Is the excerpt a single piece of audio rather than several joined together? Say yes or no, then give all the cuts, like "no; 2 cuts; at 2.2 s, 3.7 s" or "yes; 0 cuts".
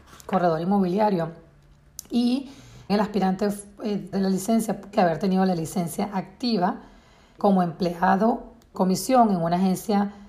no; 5 cuts; at 2.9 s, 4.1 s, 4.9 s, 7.4 s, 8.7 s